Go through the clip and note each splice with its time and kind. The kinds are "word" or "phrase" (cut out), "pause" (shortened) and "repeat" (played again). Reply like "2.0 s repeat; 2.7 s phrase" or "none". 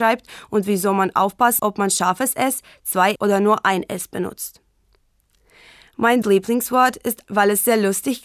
1.6 s word; 3.2 s word; 6.2 s word; 7.2 s word

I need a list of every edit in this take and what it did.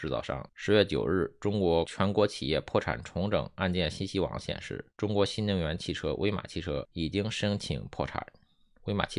4.9 s pause

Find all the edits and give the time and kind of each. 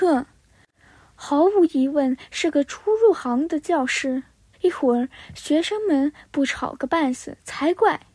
4.5 s phrase

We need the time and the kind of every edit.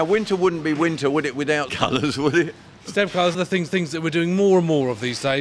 1.7 s word; 3.3 s phrase; 3.7 s repeat

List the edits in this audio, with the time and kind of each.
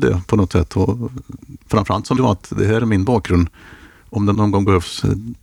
1.7 s word; 2.2 s word; 4.3 s word

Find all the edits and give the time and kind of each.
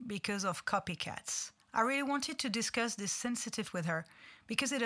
1.6 s pause; 3.6 s word

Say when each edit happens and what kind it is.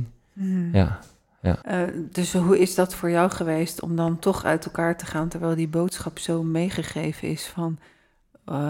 1.6 s pause

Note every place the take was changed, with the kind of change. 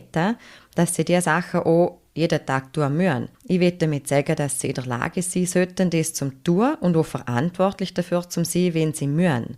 3.3 s pause

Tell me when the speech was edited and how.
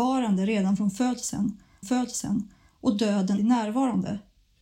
1.8 s repeat; 3.4 s word

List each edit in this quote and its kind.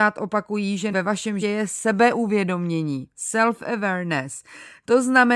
0.9 s word; 1.4 s word

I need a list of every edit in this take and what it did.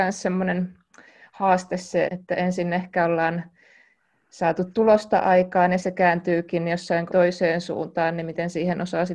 2.1 s word; 5.8 s word; 7.1 s word

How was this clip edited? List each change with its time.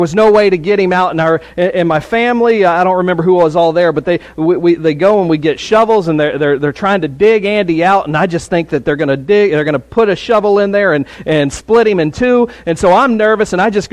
none

